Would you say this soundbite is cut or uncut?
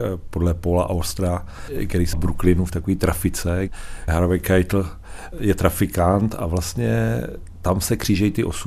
cut